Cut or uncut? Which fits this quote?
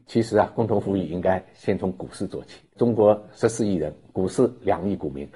uncut